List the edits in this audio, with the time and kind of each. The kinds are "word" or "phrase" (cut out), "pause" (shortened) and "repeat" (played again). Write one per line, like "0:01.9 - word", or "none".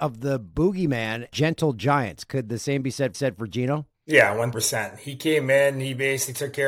0:01.3 - word
0:03.1 - repeat
0:03.9 - pause
0:04.5 - word